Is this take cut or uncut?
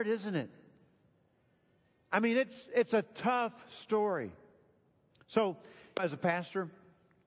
cut